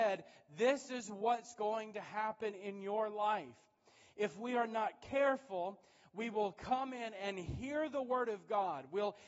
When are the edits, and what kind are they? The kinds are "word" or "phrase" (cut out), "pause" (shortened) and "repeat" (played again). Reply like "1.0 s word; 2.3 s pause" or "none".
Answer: none